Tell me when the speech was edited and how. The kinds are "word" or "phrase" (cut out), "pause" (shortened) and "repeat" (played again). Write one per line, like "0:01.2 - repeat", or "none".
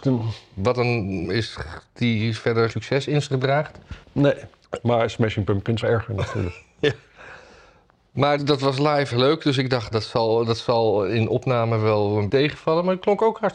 0:01.2 - word
0:02.7 - word
0:04.0 - pause
0:05.8 - phrase
0:08.4 - word
0:09.1 - phrase
0:09.9 - word
0:12.3 - word